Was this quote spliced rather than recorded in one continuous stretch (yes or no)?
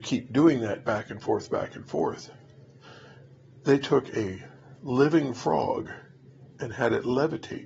yes